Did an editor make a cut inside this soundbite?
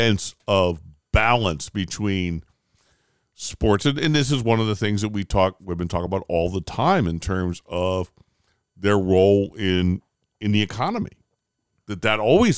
no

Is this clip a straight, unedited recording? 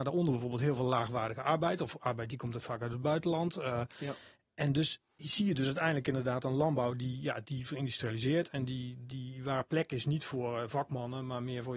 yes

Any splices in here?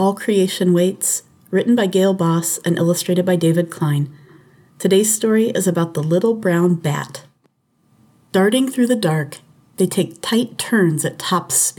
no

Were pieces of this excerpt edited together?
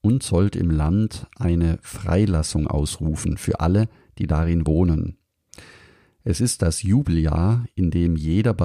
no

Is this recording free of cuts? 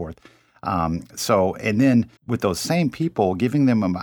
no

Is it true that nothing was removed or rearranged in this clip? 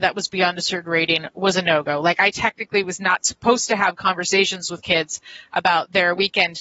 yes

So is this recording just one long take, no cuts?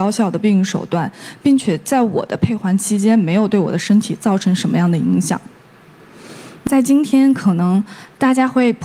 yes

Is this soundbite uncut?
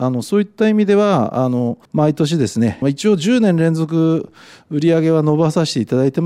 no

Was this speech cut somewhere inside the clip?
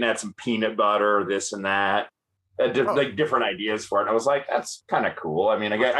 no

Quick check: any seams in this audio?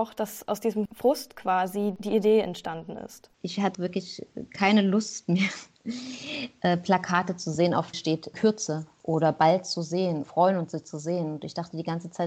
yes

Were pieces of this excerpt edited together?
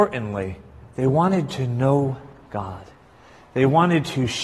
no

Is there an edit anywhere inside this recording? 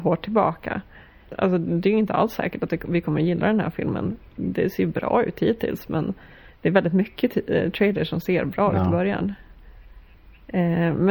no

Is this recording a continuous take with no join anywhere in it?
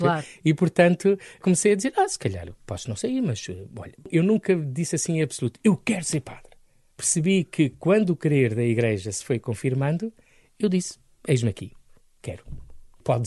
yes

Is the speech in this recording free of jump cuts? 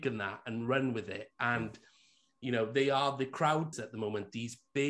no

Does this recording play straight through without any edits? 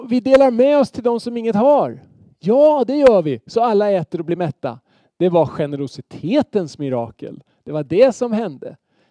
yes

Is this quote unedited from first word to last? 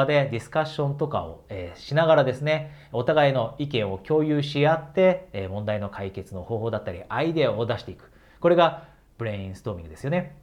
yes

